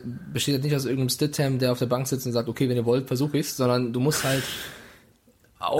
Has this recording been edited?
no; 0 cuts

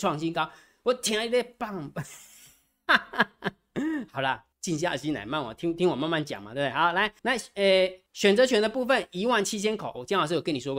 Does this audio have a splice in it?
yes; 3 cuts; at 4.5 s, 7.2 s, 8.1 s

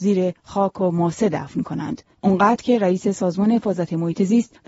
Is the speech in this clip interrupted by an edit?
no; 0 cuts

